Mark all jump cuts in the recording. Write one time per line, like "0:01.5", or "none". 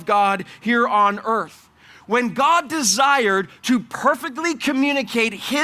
none

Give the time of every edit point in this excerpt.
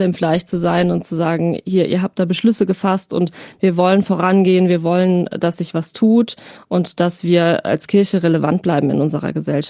none

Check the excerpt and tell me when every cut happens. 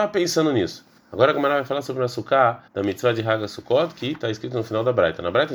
0:01.0
0:02.7

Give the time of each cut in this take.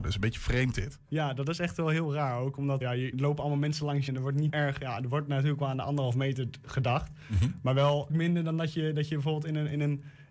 0:02.8
0:03.1
0:04.1
0:04.5
0:08.1

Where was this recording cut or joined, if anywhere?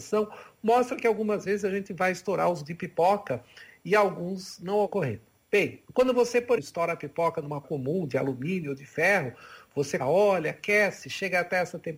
0:02.6
0:04.9
0:05.9
0:06.6
0:07.6
0:10.0

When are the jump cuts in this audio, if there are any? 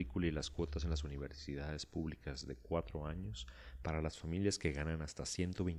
none

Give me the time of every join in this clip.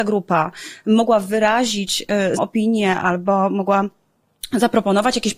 0:02.4

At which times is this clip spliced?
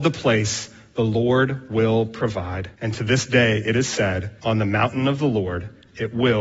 0:02.7
0:04.4

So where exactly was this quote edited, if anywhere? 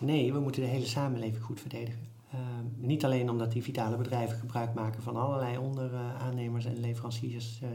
0:02.2

